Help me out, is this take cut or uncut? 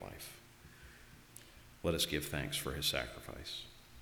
uncut